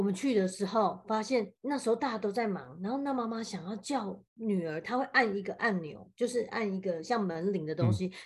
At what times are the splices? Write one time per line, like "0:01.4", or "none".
0:01.6
0:04.3